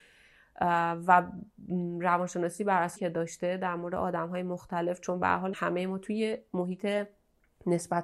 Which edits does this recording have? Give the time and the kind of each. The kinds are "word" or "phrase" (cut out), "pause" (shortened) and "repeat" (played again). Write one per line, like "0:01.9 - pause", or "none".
0:03.0 - word
0:05.5 - word